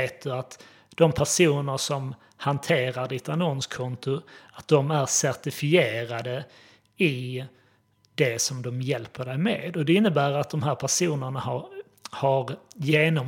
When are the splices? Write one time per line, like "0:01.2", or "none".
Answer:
none